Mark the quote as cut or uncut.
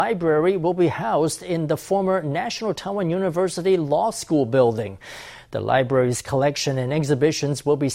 uncut